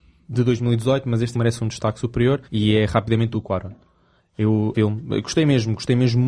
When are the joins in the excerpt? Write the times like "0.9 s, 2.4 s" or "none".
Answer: 1.3 s, 2.4 s, 3.3 s, 4.7 s